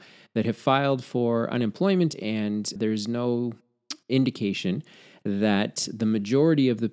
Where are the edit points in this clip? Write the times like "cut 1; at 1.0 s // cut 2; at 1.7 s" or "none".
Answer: cut 1; at 2.1 s // cut 2; at 2.8 s